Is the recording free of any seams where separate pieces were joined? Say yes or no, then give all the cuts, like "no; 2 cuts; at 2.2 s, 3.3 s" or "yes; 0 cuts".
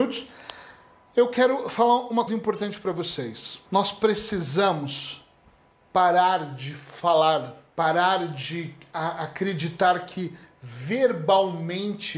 no; 3 cuts; at 2.3 s, 3.7 s, 7.7 s